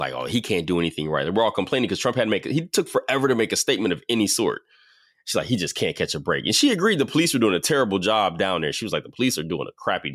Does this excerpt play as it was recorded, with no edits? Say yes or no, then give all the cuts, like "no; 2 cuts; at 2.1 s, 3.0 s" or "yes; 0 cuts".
yes; 0 cuts